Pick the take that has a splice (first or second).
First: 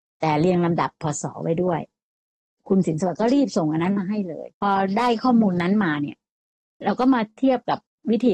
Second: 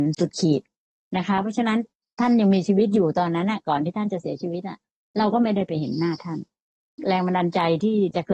first